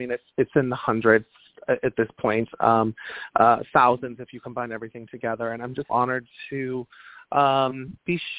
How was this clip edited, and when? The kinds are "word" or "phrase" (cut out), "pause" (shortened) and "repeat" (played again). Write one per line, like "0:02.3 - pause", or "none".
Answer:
0:05.9 - word

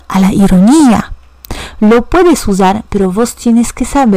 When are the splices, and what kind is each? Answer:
none

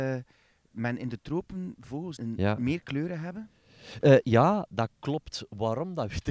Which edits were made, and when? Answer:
0:02.2 - word

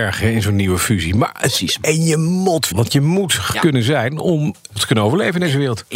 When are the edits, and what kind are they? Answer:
0:02.7 - word
0:03.5 - word
0:04.8 - word

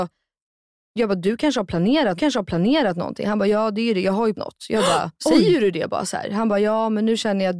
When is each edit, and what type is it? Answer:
0:02.2 - repeat
0:04.3 - word
0:05.2 - pause

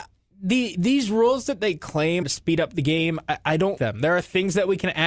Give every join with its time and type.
0:02.2 - word
0:03.8 - word

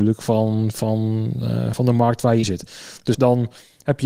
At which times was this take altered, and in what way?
0:01.7 - word
0:02.4 - word
0:03.1 - word

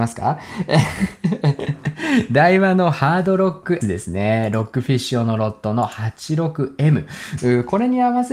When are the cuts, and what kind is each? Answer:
0:03.8 - word

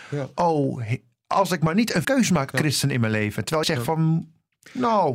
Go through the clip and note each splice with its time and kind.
0:02.0 - word
0:02.5 - word
0:03.6 - word

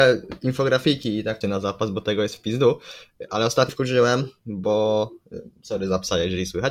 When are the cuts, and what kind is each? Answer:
0:01.4 - word
0:03.7 - word

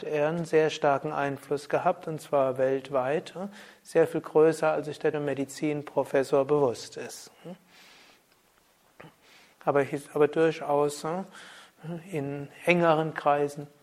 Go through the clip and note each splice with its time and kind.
0:05.1 - word

